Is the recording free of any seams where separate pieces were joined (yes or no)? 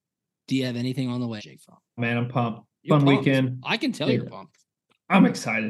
no